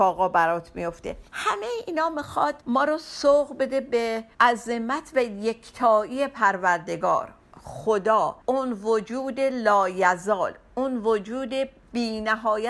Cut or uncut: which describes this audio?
cut